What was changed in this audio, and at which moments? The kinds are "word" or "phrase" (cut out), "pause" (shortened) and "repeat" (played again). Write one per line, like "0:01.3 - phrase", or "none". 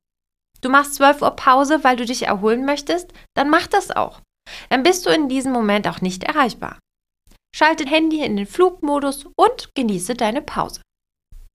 0:07.9 - word